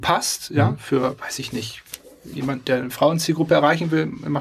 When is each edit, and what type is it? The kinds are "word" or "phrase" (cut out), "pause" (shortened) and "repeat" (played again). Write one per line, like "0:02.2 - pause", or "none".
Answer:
none